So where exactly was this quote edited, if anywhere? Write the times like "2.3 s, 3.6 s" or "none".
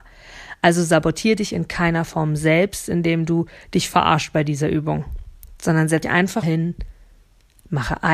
6.0 s, 6.4 s